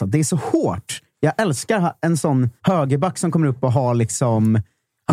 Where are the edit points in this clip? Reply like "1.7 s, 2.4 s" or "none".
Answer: 2.6 s